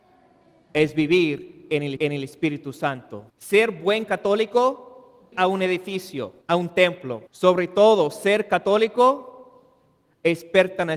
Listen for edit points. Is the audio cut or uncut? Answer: cut